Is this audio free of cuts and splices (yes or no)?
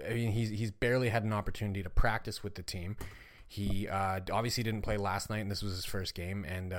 yes